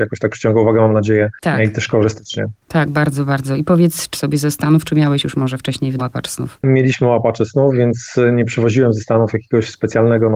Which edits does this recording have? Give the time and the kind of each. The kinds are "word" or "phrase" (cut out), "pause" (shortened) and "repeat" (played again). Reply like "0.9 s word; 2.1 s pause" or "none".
4.1 s word; 6.0 s word